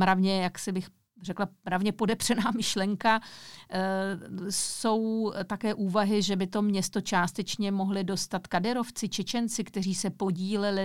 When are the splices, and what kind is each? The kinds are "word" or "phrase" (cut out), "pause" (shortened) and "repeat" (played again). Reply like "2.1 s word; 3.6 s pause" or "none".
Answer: none